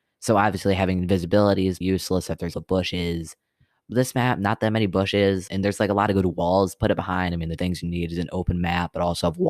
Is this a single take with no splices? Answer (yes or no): no